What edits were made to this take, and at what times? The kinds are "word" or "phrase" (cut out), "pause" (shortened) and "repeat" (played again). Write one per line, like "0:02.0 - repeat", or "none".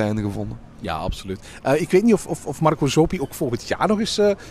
none

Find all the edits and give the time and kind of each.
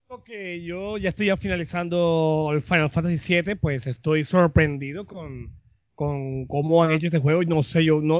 none

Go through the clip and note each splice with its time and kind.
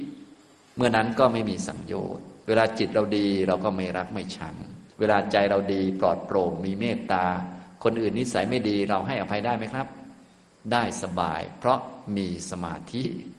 0:04.9 - pause

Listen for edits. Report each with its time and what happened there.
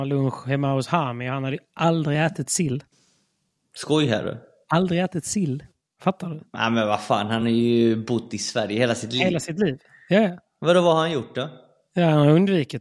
none

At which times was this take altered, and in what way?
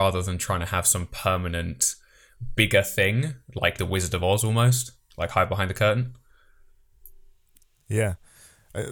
0:03.8 - phrase

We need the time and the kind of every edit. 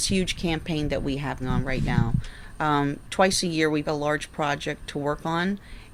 0:01.4 - word
0:03.0 - word
0:03.8 - word

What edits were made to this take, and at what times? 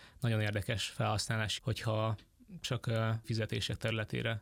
0:01.6 - word
0:03.2 - word

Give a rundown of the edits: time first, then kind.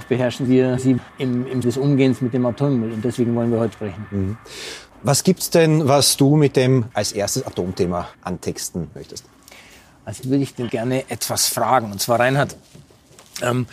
0:01.1 - pause
0:01.6 - word
0:03.7 - word
0:04.9 - pause
0:06.9 - word
0:08.1 - pause
0:09.0 - word
0:10.2 - word
0:10.7 - word

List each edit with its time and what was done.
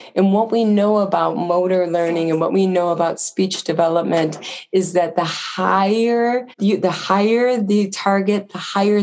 0:06.5 - pause

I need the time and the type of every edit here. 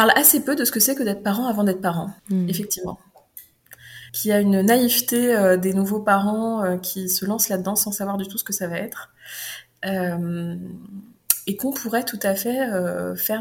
0:02.2 - pause
0:04.1 - pause

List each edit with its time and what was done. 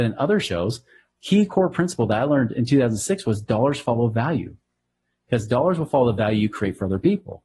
none

